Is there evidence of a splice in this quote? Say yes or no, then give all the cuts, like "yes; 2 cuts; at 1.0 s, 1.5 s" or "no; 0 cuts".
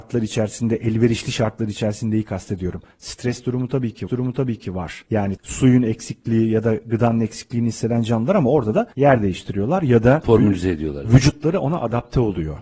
yes; 2 cuts; at 4.1 s, 5.4 s